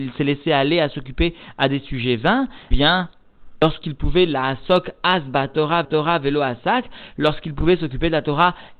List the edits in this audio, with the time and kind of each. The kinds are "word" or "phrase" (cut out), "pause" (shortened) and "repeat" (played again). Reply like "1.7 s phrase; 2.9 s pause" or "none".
2.7 s word; 5.8 s repeat